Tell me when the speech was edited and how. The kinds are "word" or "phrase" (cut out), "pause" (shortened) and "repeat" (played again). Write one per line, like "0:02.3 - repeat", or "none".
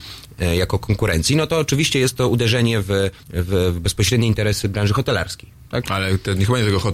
0:03.2 - pause